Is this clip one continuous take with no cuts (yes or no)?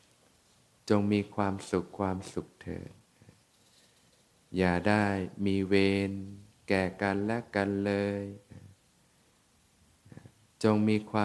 yes